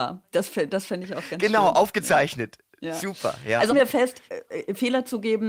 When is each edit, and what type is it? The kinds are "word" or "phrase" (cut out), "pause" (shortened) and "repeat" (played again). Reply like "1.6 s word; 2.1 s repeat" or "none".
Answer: 3.7 s word; 4.3 s pause